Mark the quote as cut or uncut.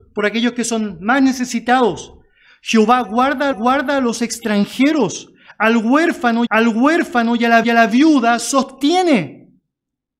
cut